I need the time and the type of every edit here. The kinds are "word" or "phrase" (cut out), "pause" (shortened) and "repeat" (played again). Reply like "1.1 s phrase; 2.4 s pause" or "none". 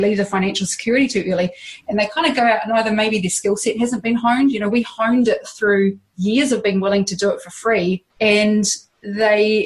8.1 s pause